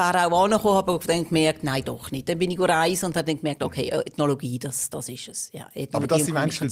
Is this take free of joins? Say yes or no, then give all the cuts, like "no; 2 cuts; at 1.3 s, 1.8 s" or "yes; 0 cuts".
yes; 0 cuts